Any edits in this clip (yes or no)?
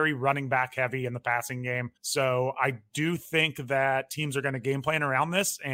yes